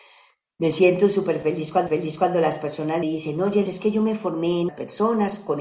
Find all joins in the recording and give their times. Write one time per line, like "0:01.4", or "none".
0:01.9
0:03.0
0:03.7
0:04.7